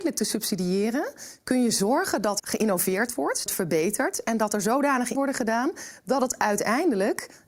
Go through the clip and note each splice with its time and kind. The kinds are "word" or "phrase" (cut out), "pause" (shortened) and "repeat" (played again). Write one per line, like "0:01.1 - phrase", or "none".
0:02.4 - word
0:03.5 - phrase
0:05.1 - word